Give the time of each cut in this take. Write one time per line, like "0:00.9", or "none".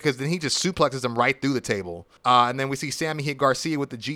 0:02.2